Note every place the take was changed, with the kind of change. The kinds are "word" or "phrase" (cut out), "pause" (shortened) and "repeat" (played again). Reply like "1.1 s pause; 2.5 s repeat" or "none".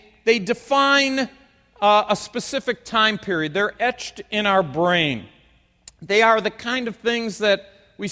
none

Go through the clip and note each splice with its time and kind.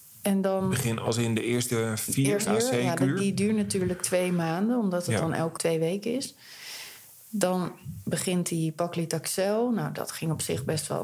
2.5 s phrase; 5.6 s word

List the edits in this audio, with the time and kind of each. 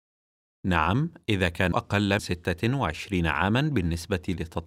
1.7 s word; 2.2 s word

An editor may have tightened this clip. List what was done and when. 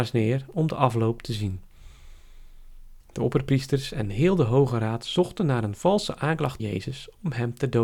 3.0 s pause; 6.6 s word

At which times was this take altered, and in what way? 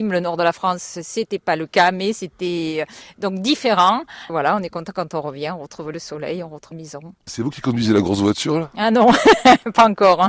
6.7 s word

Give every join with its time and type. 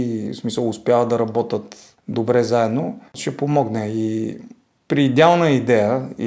3.1 s pause

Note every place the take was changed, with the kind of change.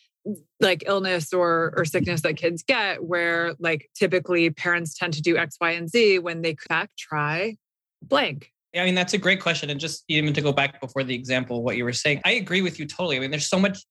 6.7 s word; 8.7 s word; 12.2 s word

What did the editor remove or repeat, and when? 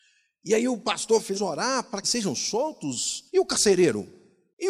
1.3 s phrase; 2.0 s phrase; 3.3 s pause

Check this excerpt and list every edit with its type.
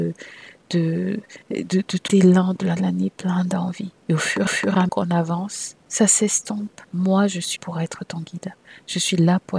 1.4 s pause; 2.1 s word; 2.8 s word; 4.0 s pause; 4.5 s repeat; 4.9 s word; 5.8 s pause; 6.8 s pause; 7.6 s word

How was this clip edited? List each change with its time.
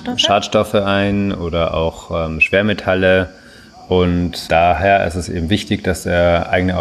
4.5 s word

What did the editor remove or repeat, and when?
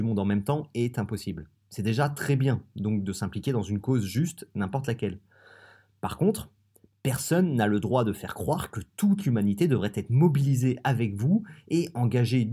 none

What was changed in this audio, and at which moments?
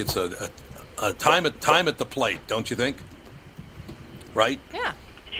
1.5 s repeat

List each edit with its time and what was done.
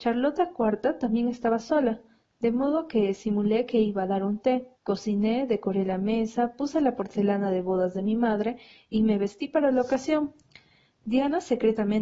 4.8 s pause

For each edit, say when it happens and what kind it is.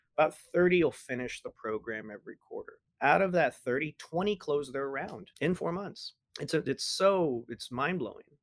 2.9 s pause; 5.3 s pause; 6.3 s pause

